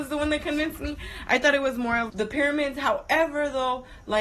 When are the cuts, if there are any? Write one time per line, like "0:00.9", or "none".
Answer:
0:02.1